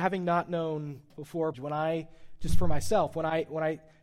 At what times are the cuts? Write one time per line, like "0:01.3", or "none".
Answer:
0:01.1
0:01.5